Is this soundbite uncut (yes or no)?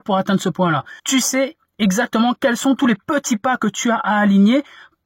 no